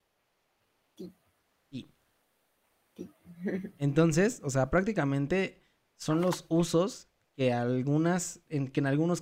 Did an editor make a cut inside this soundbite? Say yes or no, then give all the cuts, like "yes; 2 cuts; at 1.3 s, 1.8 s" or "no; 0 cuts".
no; 0 cuts